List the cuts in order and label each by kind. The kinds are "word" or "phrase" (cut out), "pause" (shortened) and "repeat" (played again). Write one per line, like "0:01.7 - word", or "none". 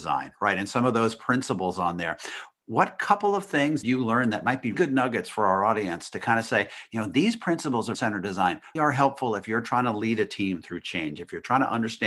0:03.8 - word
0:04.7 - word
0:07.9 - word
0:08.8 - word